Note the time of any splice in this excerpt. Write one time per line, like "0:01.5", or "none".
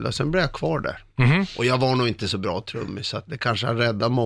0:03.3